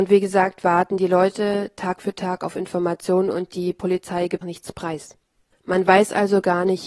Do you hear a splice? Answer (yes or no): yes